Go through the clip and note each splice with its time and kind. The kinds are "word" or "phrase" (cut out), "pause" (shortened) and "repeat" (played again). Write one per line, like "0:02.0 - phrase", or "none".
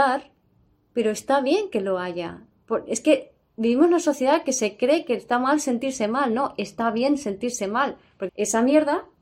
0:08.3 - word